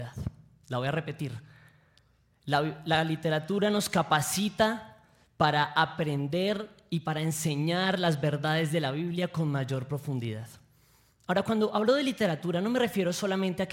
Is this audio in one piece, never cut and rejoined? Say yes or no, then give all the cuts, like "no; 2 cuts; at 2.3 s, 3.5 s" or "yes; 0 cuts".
yes; 0 cuts